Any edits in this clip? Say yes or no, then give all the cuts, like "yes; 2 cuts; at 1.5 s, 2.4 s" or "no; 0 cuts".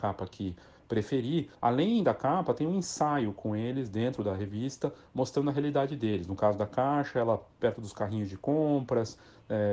yes; 1 cut; at 1.5 s